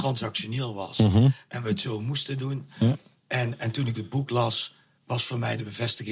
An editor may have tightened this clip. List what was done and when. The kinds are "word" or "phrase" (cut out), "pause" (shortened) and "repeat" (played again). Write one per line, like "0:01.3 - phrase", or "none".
none